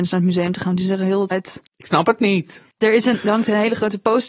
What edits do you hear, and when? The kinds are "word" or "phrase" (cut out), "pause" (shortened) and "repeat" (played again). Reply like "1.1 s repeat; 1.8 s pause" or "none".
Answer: 1.3 s word; 1.7 s pause; 2.7 s pause; 3.1 s word